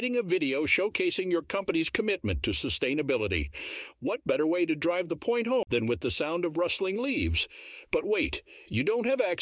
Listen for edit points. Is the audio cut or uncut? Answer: uncut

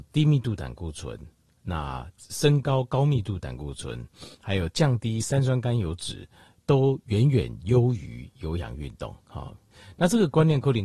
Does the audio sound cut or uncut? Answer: uncut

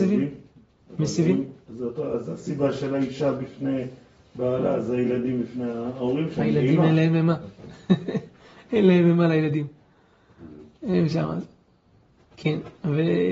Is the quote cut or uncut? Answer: uncut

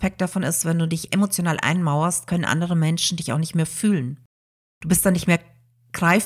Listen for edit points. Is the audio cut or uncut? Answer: uncut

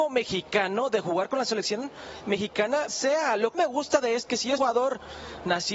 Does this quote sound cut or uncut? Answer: cut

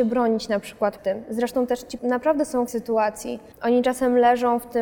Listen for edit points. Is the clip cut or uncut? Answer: cut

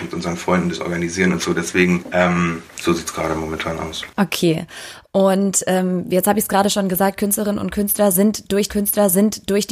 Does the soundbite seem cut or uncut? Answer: cut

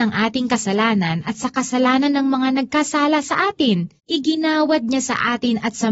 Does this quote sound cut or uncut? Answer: cut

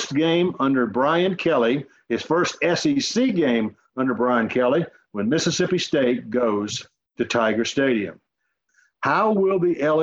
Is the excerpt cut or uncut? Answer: uncut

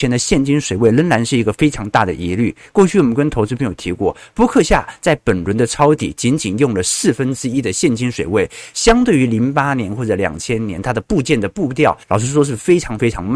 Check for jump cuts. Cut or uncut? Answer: cut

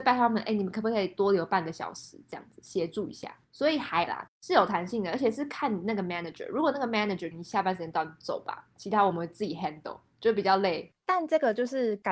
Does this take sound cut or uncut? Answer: cut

